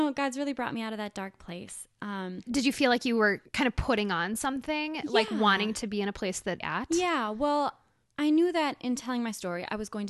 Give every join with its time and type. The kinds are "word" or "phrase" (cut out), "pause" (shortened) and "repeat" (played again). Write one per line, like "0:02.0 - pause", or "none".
0:02.5 - phrase
0:06.6 - phrase

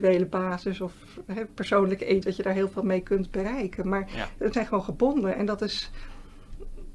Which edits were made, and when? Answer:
0:02.2 - word
0:04.5 - word

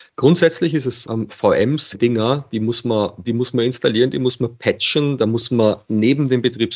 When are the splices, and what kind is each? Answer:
0:01.0 - word
0:01.9 - phrase
0:03.2 - word

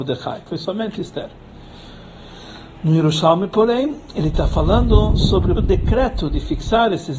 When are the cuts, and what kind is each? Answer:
0:05.6 - word

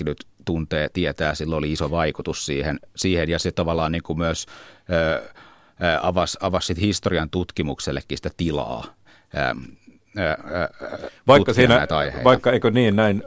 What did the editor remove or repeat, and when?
none

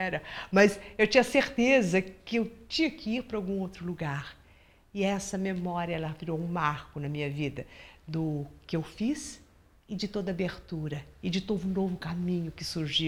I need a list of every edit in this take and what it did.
none

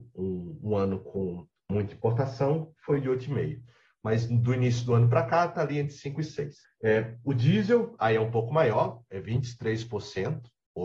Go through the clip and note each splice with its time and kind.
0:01.6 - pause
0:06.6 - pause

